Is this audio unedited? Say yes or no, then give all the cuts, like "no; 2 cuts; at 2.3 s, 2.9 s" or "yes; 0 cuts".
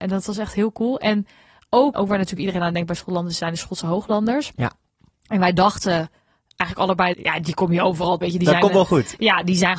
no; 3 cuts; at 1.9 s, 7.1 s, 8.2 s